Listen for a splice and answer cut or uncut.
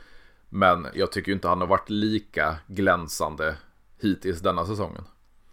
uncut